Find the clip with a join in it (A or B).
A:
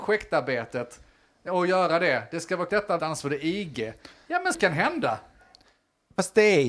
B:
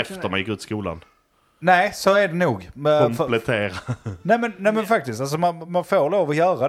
A